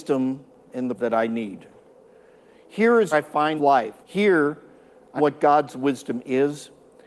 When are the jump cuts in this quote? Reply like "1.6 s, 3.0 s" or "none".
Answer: 1.0 s, 3.1 s, 3.6 s, 4.0 s, 5.2 s